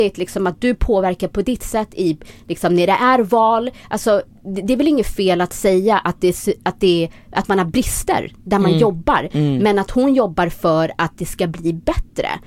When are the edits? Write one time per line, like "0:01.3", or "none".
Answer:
none